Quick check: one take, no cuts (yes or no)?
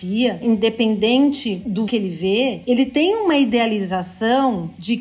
no